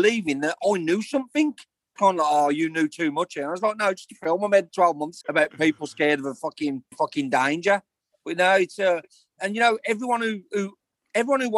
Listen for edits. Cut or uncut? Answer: cut